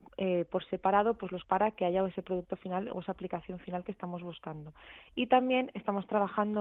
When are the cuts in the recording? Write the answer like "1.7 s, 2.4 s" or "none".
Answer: 1.4 s

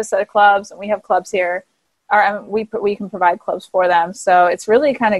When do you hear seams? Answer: none

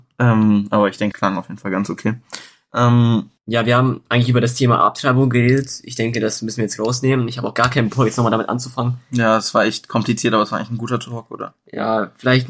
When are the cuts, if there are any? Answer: 1.1 s, 3.4 s

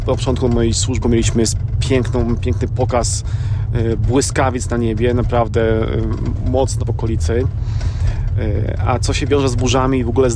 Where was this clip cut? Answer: 1.0 s, 6.8 s

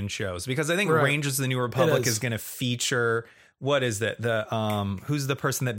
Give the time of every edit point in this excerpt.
none

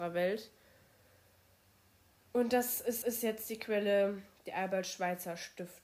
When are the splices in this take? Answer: 3.0 s

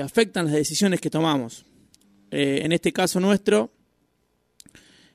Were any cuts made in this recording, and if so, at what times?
none

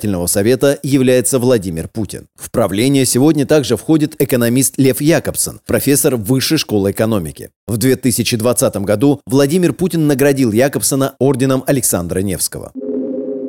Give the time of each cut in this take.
none

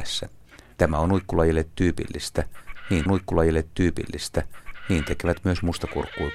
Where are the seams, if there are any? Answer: 3.1 s

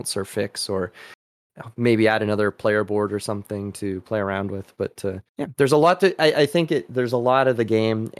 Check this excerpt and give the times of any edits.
5.3 s

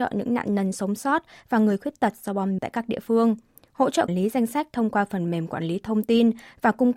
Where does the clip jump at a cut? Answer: 2.6 s, 4.1 s

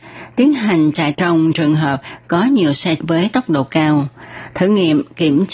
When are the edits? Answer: 1.1 s, 3.0 s

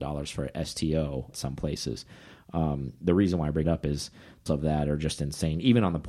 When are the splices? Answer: 1.3 s, 3.6 s, 4.5 s

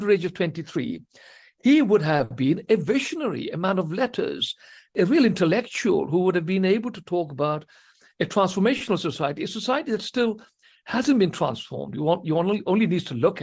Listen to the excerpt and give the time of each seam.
none

